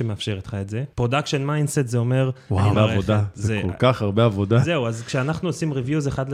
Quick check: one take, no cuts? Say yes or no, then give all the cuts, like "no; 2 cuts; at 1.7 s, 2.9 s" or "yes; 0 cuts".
no; 2 cuts; at 0.9 s, 2.7 s